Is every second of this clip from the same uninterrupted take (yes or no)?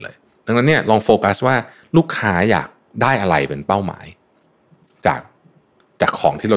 yes